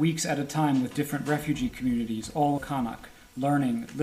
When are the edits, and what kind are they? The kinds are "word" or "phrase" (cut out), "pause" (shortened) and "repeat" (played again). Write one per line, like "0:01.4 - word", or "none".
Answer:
0:02.6 - word